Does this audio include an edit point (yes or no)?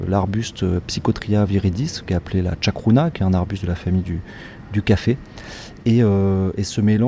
no